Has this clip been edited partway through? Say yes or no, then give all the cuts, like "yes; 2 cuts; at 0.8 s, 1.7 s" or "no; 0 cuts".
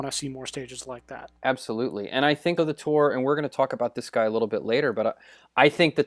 yes; 2 cuts; at 1.4 s, 2.6 s